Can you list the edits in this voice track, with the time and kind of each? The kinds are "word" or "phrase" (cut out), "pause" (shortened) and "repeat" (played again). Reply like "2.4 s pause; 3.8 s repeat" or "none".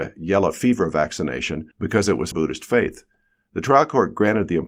1.7 s pause; 2.3 s phrase